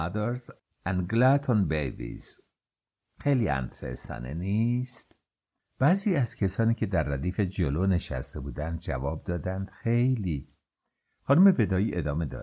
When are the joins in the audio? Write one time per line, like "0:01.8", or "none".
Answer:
none